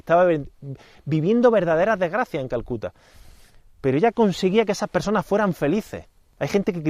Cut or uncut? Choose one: uncut